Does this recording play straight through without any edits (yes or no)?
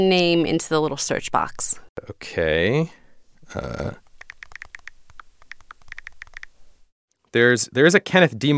yes